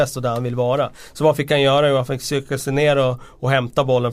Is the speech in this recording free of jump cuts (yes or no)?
yes